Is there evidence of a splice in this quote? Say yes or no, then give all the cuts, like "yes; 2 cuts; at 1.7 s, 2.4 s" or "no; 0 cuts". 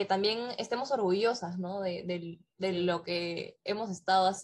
no; 0 cuts